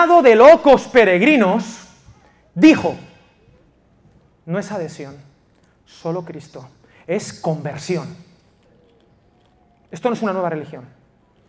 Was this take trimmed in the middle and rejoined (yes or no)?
no